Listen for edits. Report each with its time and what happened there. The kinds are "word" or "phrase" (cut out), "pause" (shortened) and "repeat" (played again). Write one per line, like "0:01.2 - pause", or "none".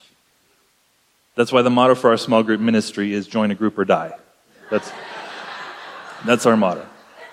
none